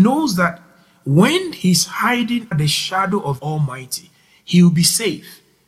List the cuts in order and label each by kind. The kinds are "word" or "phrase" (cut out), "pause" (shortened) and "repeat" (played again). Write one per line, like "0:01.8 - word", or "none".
0:02.5 - word
0:03.4 - word